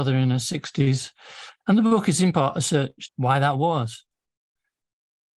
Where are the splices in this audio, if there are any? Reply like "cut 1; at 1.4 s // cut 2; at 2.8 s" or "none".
cut 1; at 3.1 s